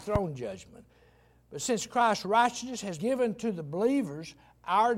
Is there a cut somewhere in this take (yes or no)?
yes